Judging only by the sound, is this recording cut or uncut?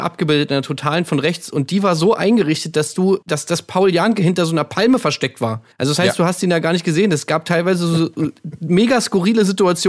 cut